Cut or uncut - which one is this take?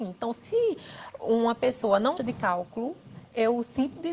cut